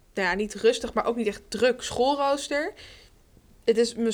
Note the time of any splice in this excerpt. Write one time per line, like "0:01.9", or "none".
none

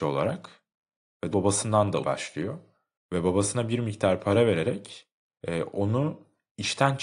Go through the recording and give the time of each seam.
0:01.3
0:02.0

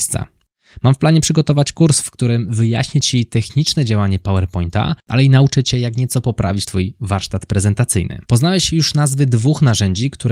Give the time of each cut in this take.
0:05.0
0:08.3

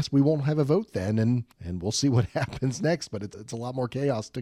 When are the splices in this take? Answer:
0:01.5
0:03.3

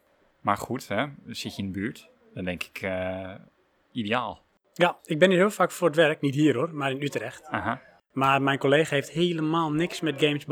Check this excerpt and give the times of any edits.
none

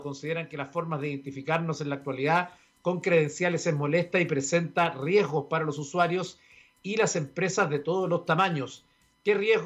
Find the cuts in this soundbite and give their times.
none

